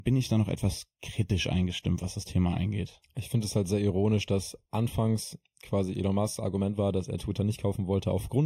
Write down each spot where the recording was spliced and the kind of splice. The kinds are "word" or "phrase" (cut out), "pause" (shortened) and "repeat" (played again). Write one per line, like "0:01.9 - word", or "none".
none